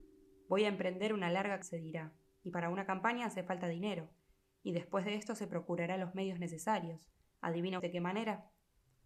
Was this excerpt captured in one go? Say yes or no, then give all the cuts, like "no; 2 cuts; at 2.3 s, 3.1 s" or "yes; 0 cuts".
no; 2 cuts; at 1.6 s, 7.8 s